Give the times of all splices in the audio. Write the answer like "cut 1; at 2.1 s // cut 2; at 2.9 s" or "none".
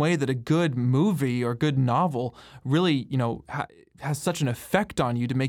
none